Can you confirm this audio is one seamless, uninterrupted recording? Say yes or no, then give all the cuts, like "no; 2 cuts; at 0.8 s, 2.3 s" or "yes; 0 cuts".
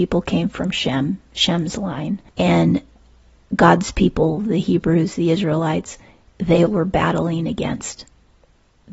no; 1 cut; at 6.7 s